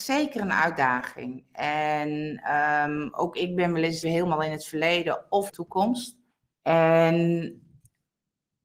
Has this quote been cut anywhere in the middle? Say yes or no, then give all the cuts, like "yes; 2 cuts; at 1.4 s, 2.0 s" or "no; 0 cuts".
yes; 3 cuts; at 4.0 s, 5.5 s, 6.3 s